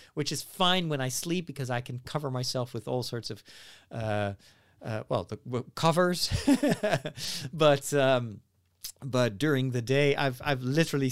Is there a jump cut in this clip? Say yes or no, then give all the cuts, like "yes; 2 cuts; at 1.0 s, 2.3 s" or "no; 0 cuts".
no; 0 cuts